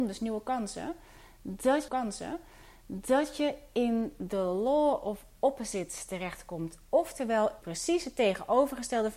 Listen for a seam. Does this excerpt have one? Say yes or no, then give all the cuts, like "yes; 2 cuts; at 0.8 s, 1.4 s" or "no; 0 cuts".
yes; 2 cuts; at 1.9 s, 7.6 s